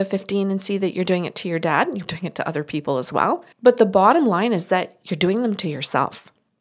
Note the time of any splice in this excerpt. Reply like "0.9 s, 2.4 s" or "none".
2.1 s, 3.5 s